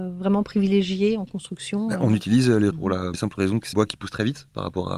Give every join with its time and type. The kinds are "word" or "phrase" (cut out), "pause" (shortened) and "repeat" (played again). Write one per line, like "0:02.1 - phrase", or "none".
0:02.7 - word
0:03.1 - word
0:03.7 - phrase